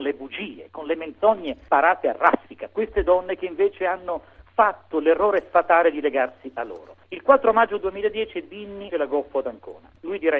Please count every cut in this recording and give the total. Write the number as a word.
one